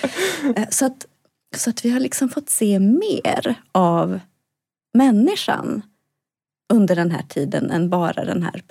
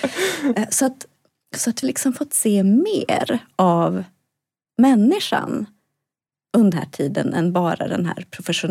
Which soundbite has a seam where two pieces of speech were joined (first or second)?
second